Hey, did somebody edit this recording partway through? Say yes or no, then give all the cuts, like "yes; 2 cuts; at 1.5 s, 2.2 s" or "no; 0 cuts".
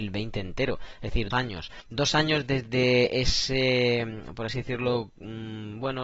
yes; 1 cut; at 1.3 s